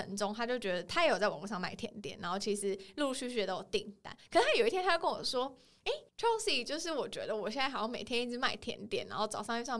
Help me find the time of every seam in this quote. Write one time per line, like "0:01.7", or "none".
0:06.1